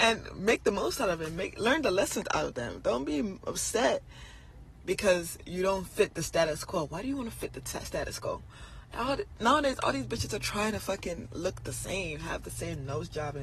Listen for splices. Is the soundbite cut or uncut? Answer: uncut